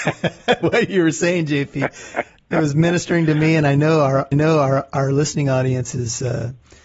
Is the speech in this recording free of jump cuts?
no; 1 cut; at 4.3 s

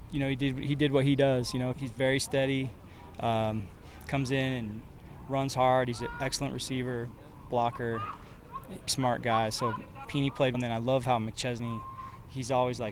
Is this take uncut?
no; 4 cuts; at 1.7 s, 8.9 s, 10.0 s, 10.5 s

